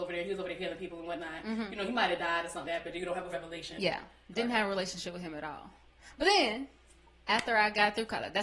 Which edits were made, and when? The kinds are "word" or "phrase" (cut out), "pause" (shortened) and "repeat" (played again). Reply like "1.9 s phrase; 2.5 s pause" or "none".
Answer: 2.6 s word; 3.3 s word